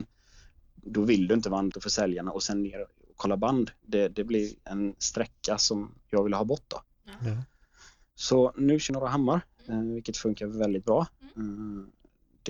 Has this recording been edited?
yes; 2 cuts; at 1.7 s, 8.9 s

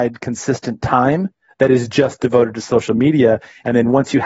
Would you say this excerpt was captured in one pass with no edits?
yes; 0 cuts

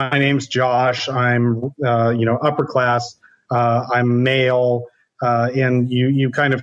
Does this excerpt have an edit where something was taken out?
no; 0 cuts

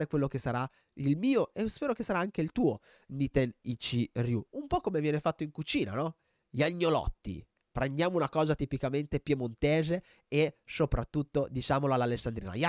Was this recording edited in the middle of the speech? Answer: no; 0 cuts

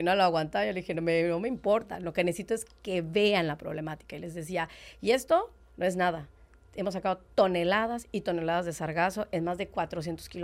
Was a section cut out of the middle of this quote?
no; 0 cuts

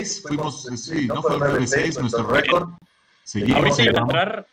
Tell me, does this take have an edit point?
no; 0 cuts

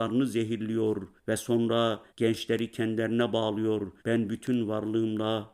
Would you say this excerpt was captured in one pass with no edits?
no; 3 cuts; at 1.2 s, 2.1 s, 4.0 s

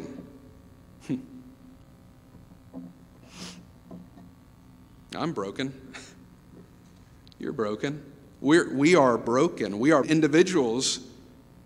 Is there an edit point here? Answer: yes; 2 cuts; at 2.9 s, 10.0 s

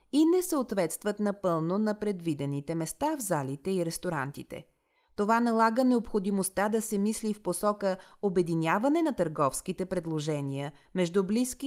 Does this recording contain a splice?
no; 0 cuts

